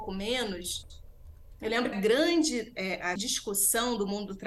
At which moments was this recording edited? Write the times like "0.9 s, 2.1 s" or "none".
1.9 s, 3.2 s